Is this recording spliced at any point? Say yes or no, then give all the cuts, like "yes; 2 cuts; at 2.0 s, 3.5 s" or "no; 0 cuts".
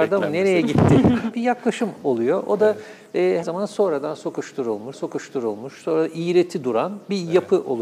yes; 3 cuts; at 1.3 s, 3.4 s, 4.9 s